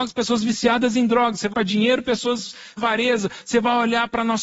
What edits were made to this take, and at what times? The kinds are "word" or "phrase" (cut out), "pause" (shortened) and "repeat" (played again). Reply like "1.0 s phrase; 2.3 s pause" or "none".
1.5 s word; 2.8 s phrase